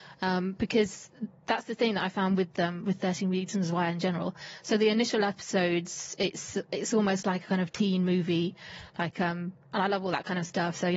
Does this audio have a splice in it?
no; 0 cuts

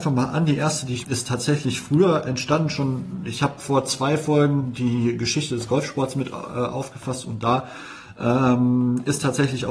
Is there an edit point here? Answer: yes; 1 cut; at 1.0 s

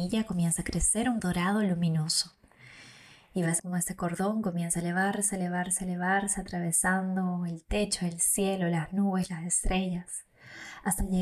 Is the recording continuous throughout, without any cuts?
no; 2 cuts; at 1.2 s, 3.6 s

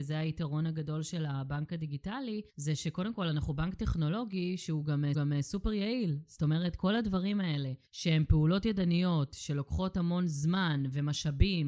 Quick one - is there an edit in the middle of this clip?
yes; 3 cuts; at 2.5 s, 5.1 s, 7.9 s

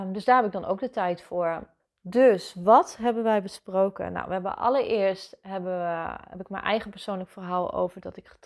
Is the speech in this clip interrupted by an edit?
yes; 1 cut; at 1.8 s

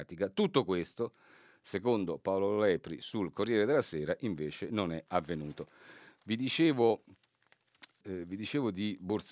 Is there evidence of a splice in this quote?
yes; 1 cut; at 8.0 s

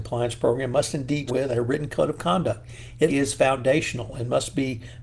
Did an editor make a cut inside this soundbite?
yes; 2 cuts; at 1.3 s, 3.1 s

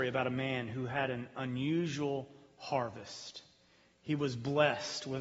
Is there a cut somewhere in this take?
no; 0 cuts

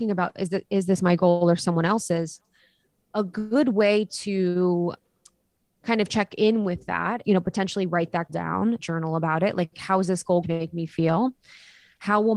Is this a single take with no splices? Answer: no; 4 cuts; at 7.2 s, 8.3 s, 8.8 s, 10.4 s

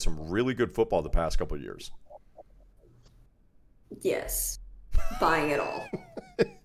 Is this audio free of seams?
yes; 0 cuts

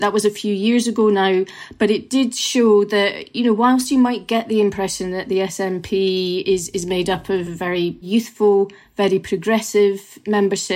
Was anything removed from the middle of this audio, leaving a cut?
no; 0 cuts

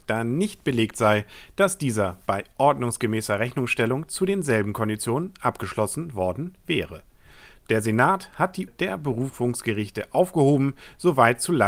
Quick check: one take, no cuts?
no; 1 cut; at 8.7 s

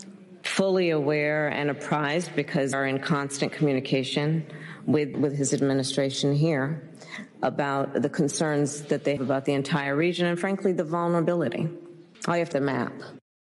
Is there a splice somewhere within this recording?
yes; 5 cuts; at 2.7 s, 5.1 s, 9.2 s, 12.1 s, 12.5 s

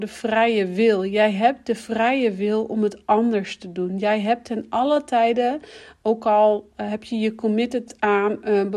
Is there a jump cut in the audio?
no; 0 cuts

